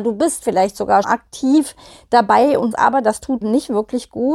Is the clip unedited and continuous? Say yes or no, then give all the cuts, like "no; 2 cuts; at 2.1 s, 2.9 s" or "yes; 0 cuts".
no; 3 cuts; at 1.0 s, 2.7 s, 3.4 s